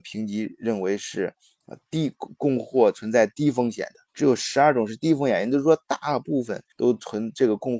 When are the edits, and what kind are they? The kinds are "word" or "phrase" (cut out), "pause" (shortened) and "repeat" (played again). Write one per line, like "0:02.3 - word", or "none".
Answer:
0:04.1 - pause
0:06.7 - pause